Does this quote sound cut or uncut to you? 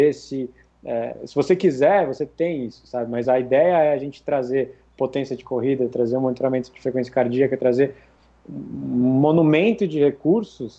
uncut